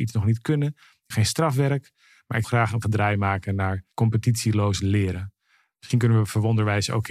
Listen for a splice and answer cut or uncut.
cut